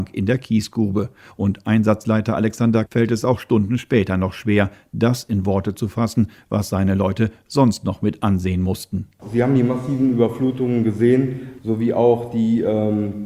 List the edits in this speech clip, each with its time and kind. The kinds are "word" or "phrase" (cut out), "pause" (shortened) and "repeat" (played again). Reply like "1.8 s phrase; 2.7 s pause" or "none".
2.9 s word